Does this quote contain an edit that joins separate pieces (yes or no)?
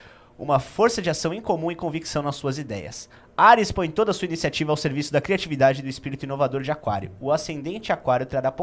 no